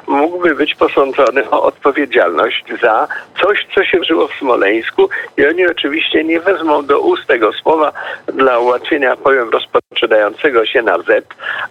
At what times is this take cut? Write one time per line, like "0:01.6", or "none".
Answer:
0:04.0